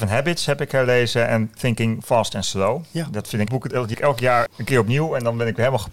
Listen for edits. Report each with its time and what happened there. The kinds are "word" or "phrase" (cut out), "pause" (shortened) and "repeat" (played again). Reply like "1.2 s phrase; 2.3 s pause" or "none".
3.5 s word; 3.9 s word; 4.5 s word